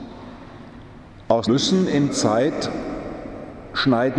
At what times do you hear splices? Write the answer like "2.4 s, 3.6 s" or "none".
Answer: 1.5 s, 2.1 s